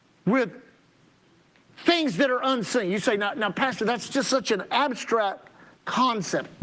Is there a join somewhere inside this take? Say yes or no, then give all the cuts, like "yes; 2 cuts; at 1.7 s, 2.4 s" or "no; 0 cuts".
no; 0 cuts